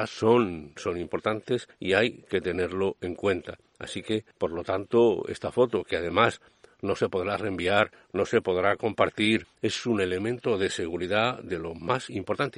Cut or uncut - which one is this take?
uncut